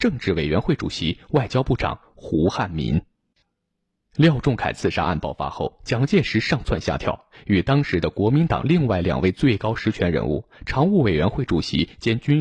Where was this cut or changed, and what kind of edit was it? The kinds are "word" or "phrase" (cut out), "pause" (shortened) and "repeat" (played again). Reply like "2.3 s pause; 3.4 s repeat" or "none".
none